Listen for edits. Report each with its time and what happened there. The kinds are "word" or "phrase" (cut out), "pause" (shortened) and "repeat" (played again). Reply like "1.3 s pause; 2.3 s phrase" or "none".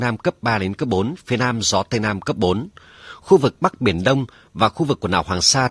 none